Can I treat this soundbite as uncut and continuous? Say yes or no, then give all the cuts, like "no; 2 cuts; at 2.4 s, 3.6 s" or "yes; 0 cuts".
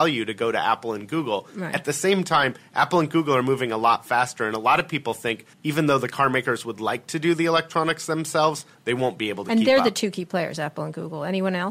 no; 1 cut; at 5.5 s